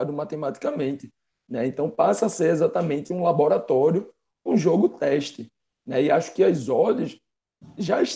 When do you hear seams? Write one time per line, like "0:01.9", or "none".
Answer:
none